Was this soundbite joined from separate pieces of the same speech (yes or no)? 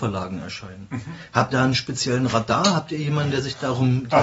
yes